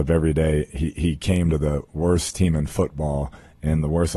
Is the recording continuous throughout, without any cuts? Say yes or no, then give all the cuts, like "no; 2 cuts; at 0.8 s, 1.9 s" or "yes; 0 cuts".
yes; 0 cuts